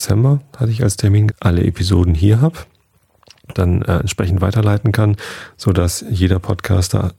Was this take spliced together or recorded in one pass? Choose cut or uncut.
cut